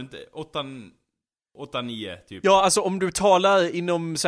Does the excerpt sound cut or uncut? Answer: uncut